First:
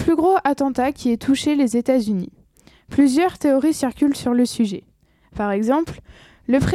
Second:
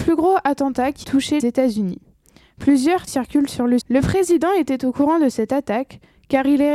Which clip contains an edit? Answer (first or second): second